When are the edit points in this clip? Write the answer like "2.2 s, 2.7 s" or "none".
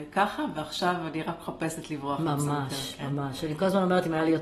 none